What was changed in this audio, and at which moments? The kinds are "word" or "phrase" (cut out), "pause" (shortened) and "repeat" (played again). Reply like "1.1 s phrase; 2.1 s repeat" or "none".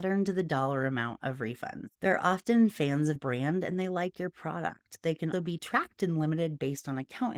1.9 s pause; 3.2 s word; 5.3 s word